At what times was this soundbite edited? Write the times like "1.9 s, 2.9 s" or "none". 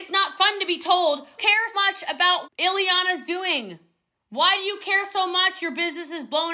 1.4 s, 1.7 s, 2.4 s